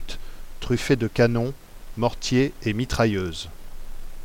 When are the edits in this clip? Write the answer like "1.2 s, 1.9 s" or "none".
none